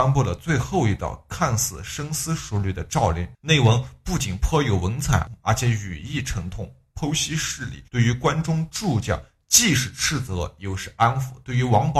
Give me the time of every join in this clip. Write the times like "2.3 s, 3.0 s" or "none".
3.3 s, 7.9 s